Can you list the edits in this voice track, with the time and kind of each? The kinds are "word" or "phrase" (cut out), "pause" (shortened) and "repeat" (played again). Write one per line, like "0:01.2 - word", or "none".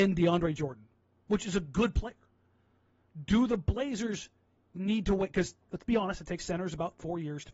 0:05.6 - pause